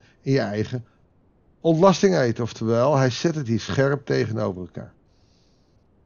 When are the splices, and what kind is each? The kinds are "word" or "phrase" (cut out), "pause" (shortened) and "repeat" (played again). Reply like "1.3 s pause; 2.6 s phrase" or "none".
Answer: none